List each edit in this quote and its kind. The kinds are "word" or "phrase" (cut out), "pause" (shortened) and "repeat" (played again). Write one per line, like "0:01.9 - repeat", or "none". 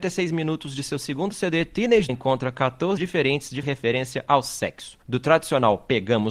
0:02.1 - phrase
0:03.0 - word
0:03.6 - word
0:05.0 - pause